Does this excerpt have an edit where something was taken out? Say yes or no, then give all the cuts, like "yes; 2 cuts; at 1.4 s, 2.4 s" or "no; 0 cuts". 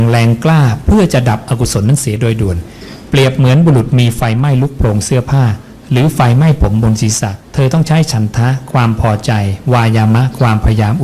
yes; 1 cut; at 7.4 s